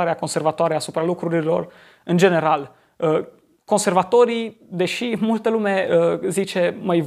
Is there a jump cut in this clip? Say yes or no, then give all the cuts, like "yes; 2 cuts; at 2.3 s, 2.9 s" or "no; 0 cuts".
no; 0 cuts